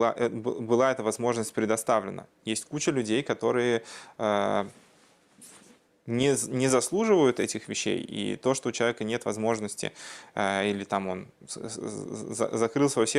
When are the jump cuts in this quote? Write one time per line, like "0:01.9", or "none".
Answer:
none